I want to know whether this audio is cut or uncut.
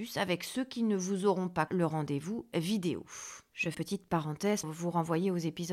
cut